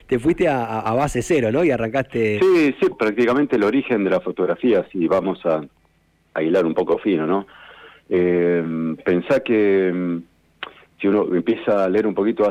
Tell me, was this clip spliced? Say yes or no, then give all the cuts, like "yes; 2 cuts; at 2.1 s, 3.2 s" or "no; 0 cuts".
yes; 1 cut; at 2.9 s